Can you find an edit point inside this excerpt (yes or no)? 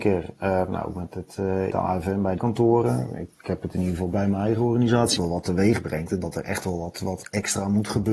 yes